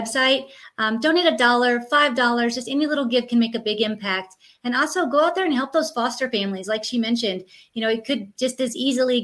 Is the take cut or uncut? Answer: uncut